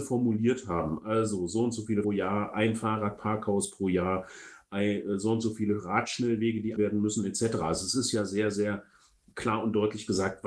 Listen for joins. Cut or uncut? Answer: cut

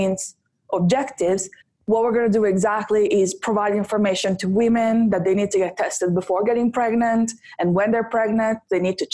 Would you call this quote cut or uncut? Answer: cut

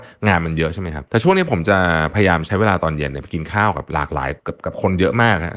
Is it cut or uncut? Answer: cut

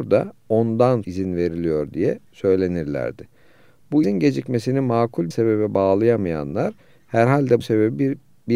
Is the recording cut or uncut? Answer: cut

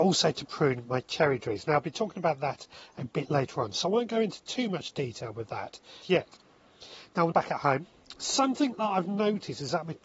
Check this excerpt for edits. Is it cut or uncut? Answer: cut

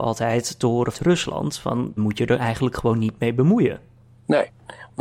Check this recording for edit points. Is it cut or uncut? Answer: cut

